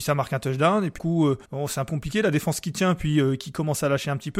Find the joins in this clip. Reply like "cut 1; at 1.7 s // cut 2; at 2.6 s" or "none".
cut 1; at 1.0 s // cut 2; at 1.4 s // cut 3; at 1.9 s